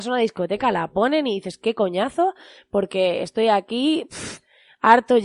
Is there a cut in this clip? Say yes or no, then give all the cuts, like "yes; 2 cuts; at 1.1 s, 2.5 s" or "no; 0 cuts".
no; 0 cuts